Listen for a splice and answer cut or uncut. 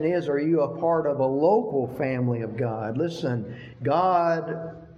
uncut